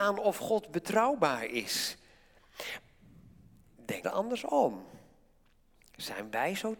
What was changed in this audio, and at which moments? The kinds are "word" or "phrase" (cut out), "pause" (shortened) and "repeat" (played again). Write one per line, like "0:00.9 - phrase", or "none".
0:04.0 - word